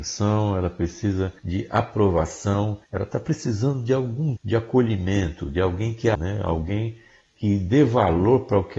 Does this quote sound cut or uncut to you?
cut